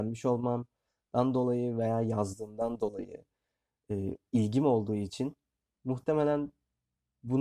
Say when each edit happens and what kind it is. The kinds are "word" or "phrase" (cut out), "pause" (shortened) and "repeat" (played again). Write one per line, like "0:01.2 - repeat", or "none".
none